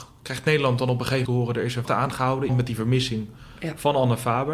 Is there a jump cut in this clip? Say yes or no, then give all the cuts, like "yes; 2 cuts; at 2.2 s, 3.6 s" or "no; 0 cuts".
yes; 3 cuts; at 1.3 s, 1.9 s, 2.5 s